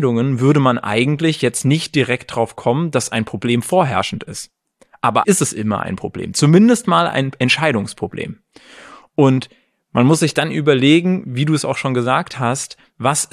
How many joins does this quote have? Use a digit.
1